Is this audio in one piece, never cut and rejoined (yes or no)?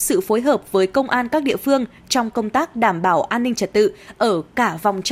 yes